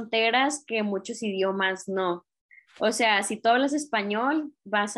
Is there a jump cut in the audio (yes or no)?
no